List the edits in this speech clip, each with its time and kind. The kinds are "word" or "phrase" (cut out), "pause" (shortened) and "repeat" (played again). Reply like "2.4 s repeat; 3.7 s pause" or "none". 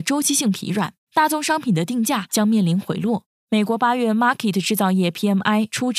none